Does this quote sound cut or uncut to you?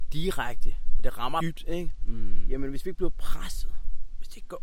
cut